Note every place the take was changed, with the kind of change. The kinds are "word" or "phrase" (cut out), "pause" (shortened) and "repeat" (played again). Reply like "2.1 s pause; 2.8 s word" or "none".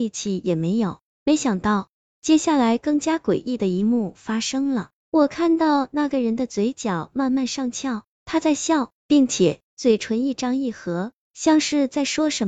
9.0 s pause; 9.7 s pause